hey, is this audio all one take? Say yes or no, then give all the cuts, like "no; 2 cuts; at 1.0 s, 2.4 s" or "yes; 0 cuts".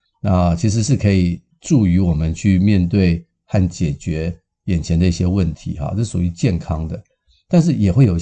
yes; 0 cuts